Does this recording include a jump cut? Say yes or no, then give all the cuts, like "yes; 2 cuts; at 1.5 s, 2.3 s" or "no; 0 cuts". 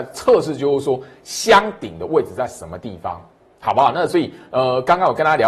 no; 0 cuts